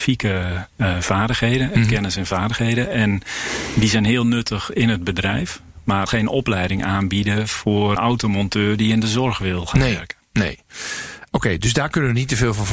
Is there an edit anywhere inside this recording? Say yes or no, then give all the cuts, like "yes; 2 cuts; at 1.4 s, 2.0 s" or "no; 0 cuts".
yes; 2 cuts; at 6.1 s, 8.0 s